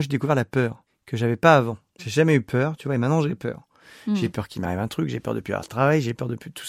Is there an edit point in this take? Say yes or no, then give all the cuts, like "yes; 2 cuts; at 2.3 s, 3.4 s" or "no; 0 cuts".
no; 0 cuts